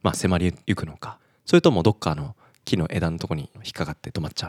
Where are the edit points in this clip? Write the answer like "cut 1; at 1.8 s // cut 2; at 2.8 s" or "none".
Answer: none